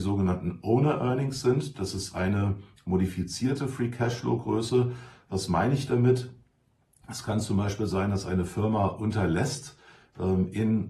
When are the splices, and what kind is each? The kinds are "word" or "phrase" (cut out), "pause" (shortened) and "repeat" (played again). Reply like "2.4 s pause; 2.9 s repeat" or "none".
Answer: none